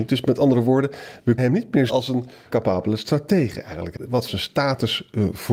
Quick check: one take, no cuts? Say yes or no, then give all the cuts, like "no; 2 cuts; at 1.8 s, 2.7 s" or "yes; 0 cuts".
no; 5 cuts; at 1.4 s, 1.9 s, 2.5 s, 4.0 s, 4.3 s